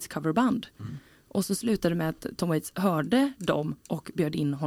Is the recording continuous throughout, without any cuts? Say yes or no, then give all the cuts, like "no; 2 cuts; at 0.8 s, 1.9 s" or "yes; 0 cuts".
yes; 0 cuts